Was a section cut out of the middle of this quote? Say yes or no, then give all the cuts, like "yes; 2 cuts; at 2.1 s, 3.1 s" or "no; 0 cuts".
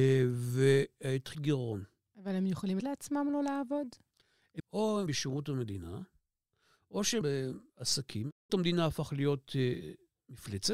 yes; 6 cuts; at 1.3 s, 2.8 s, 4.6 s, 5.1 s, 7.2 s, 8.5 s